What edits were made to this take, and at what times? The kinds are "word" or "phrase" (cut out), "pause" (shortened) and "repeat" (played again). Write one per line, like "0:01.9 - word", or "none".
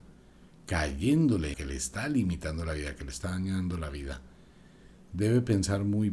0:01.5 - word